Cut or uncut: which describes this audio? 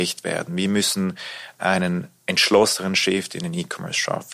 uncut